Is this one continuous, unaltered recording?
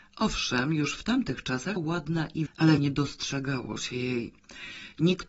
no; 3 cuts; at 1.8 s, 2.5 s, 2.8 s

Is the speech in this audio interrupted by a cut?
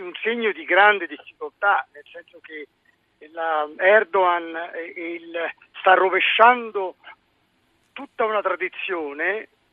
yes; 1 cut; at 1.9 s

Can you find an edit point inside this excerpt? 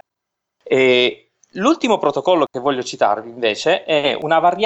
no; 0 cuts

